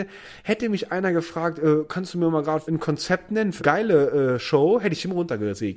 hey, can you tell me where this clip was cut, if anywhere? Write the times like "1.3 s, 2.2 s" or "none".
2.6 s, 3.6 s